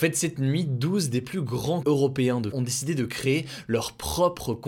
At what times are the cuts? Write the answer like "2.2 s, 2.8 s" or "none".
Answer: 1.8 s, 2.5 s